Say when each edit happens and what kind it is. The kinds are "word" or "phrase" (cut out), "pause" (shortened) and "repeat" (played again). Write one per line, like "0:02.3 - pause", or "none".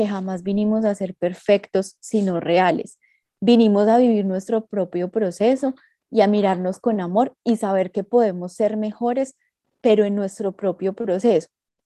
none